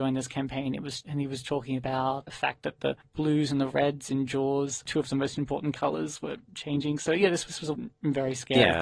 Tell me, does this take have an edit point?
yes; 2 cuts; at 2.3 s, 7.7 s

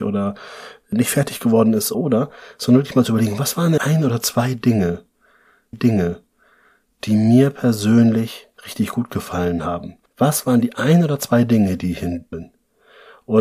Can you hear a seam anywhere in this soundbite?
yes; 5 cuts; at 1.9 s, 3.8 s, 5.7 s, 10.1 s, 12.3 s

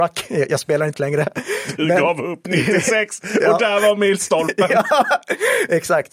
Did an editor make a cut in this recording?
yes; 1 cut; at 0.9 s

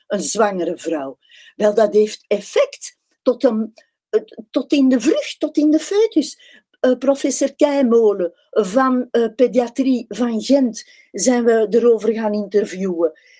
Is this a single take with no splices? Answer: yes; 0 cuts

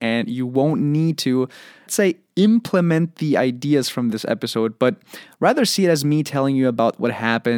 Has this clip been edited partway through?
yes; 1 cut; at 1.9 s

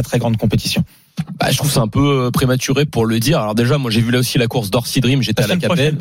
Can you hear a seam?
yes; 1 cut; at 2.9 s

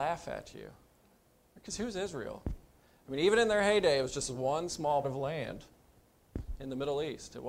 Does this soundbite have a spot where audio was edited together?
yes; 1 cut; at 5.0 s

